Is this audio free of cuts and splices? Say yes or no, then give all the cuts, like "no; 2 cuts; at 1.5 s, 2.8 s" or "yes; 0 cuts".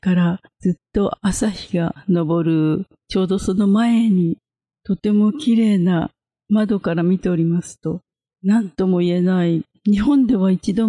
yes; 0 cuts